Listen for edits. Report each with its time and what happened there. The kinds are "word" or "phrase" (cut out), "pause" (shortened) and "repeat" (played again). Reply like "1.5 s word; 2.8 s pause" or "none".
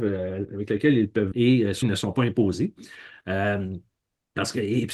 1.3 s word; 1.8 s word